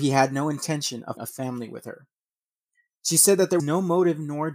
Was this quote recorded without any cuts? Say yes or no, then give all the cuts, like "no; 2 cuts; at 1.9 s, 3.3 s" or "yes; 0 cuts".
no; 2 cuts; at 1.2 s, 3.6 s